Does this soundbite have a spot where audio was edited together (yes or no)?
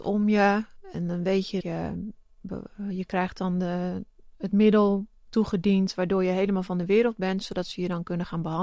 yes